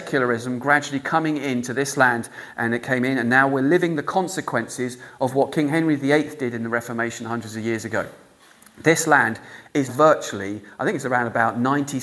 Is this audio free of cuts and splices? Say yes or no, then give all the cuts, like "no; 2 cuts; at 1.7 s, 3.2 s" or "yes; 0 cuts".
no; 1 cut; at 9.9 s